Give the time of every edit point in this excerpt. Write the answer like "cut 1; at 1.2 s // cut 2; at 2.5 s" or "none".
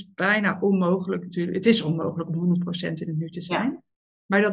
none